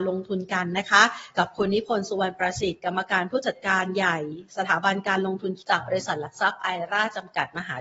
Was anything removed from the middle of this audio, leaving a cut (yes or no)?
yes